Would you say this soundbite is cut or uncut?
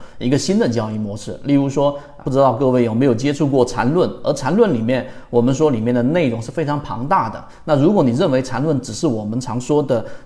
cut